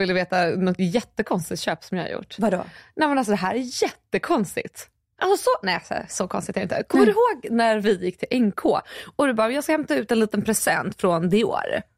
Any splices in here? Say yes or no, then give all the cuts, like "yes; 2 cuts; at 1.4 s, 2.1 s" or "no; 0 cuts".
no; 0 cuts